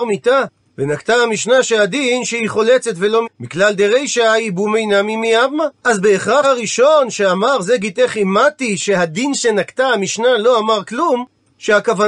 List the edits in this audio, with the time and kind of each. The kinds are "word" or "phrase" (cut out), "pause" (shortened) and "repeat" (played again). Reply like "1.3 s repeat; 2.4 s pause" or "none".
3.2 s word; 5.8 s pause; 6.4 s word

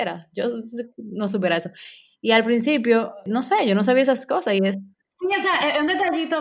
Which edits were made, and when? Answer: none

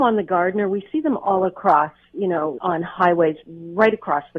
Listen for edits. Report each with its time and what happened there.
2.6 s word

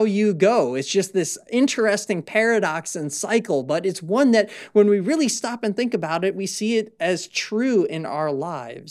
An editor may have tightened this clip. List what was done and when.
none

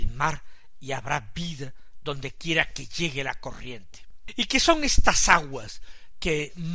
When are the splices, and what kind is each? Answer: none

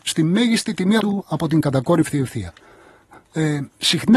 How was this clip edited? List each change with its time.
1.0 s word

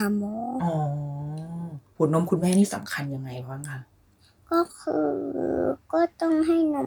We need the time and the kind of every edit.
none

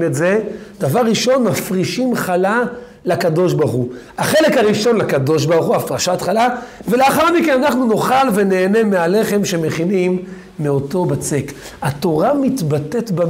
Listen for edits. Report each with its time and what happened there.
none

